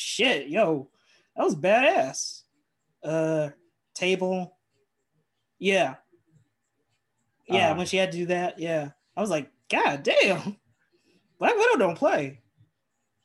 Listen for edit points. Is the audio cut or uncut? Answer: uncut